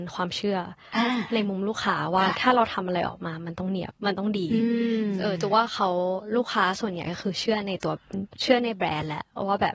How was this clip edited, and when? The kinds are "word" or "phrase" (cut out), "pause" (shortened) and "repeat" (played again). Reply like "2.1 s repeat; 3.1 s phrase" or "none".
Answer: 4.0 s pause